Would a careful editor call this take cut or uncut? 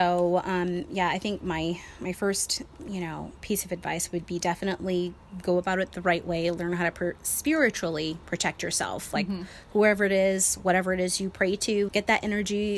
cut